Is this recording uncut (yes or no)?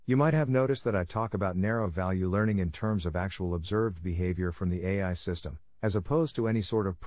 yes